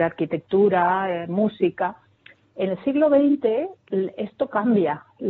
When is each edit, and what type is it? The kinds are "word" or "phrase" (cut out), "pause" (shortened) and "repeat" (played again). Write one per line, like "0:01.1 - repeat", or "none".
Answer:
none